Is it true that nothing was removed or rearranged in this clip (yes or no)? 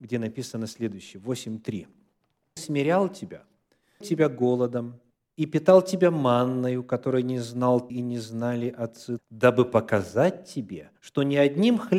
no